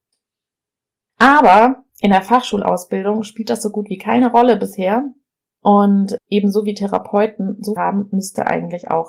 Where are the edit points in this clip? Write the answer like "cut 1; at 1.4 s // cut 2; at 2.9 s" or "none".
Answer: cut 1; at 1.9 s // cut 2; at 6.2 s // cut 3; at 7.8 s